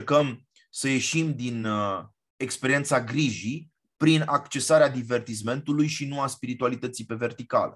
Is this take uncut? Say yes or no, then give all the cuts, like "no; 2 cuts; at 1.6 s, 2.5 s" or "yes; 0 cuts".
yes; 0 cuts